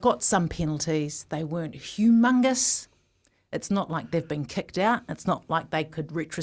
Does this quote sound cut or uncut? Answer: uncut